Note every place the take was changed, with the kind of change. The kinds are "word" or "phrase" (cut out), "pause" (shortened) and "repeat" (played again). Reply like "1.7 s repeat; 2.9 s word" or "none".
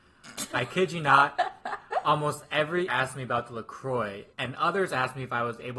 2.9 s word; 4.3 s pause